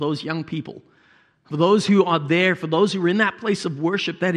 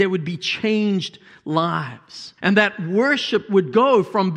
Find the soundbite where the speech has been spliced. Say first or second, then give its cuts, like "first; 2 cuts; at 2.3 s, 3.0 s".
second; 1 cut; at 2.4 s